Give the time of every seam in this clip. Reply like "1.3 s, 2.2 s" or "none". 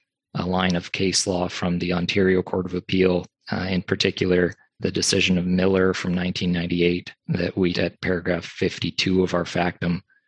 3.3 s, 4.8 s, 7.2 s, 7.7 s